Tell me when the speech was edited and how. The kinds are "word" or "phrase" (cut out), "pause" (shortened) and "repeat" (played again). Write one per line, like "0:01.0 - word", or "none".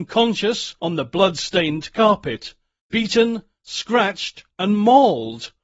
none